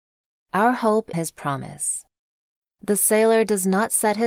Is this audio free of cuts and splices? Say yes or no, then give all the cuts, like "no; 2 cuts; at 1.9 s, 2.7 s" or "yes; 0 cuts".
no; 1 cut; at 1.1 s